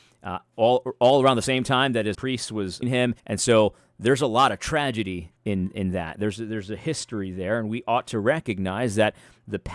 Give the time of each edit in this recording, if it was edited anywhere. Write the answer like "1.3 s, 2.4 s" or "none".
2.1 s, 2.8 s, 3.2 s, 5.4 s